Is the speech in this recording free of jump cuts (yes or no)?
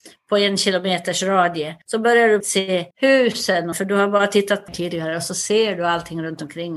no